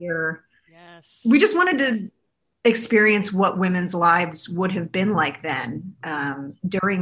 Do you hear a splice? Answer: no; 0 cuts

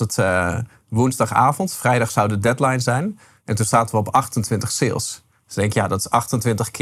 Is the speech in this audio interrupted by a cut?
no; 0 cuts

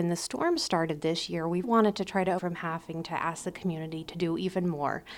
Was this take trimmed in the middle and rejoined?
yes; 2 cuts; at 1.6 s, 2.4 s

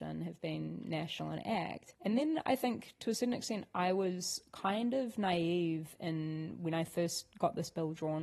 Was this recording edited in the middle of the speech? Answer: no; 0 cuts

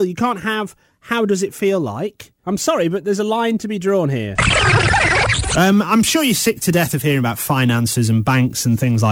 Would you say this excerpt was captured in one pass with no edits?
yes; 0 cuts

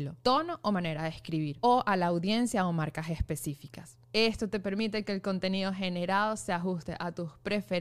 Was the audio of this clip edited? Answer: no; 0 cuts

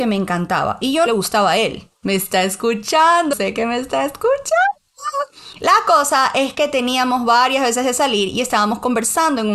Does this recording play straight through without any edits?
no; 3 cuts; at 1.1 s, 2.0 s, 3.3 s

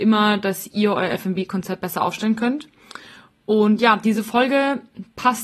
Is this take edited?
no; 0 cuts

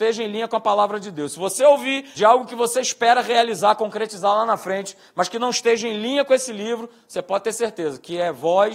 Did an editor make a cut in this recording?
yes; 1 cut; at 2.2 s

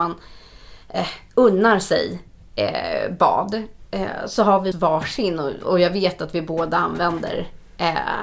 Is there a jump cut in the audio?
yes; 1 cut; at 4.7 s

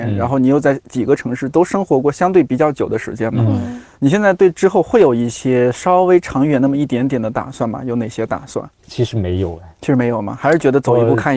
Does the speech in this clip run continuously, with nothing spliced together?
no; 1 cut; at 8.8 s

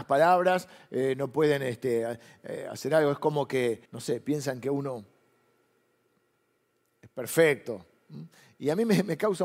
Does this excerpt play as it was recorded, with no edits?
no; 1 cut; at 3.9 s

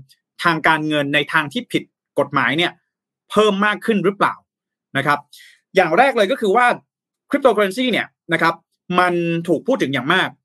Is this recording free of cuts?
yes; 0 cuts

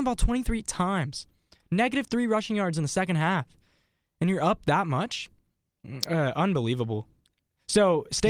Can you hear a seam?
no; 0 cuts

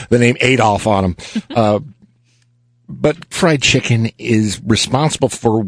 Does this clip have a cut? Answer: yes; 1 cut; at 3.3 s

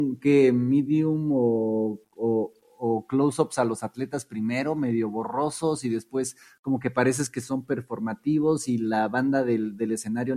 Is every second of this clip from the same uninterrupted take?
yes; 0 cuts

